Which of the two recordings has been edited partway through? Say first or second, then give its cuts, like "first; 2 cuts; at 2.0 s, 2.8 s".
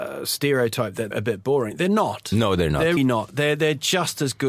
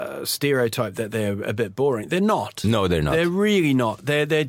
first; 2 cuts; at 1.1 s, 3.0 s